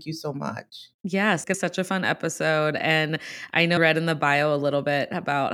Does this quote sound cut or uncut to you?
cut